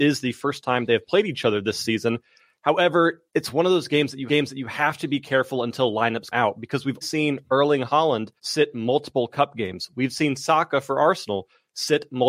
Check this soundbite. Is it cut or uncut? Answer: cut